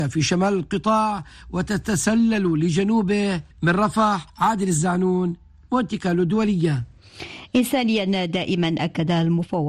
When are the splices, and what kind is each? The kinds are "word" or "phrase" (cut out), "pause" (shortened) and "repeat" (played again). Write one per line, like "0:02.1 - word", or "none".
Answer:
0:03.5 - pause
0:04.3 - pause